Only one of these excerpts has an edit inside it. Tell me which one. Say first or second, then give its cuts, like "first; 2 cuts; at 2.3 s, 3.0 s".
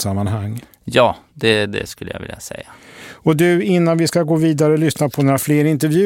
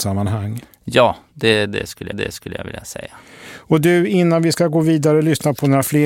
second; 1 cut; at 2.1 s